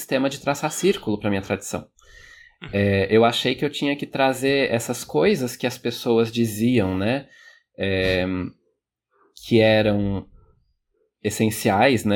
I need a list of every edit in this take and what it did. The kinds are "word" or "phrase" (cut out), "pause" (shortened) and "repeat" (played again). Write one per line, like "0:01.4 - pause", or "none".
none